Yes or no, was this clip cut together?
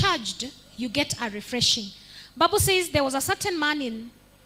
no